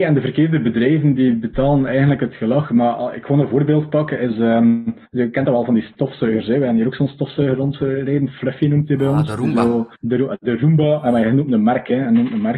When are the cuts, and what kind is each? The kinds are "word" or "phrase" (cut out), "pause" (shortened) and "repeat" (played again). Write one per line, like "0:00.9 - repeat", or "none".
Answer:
0:05.0 - pause
0:10.0 - pause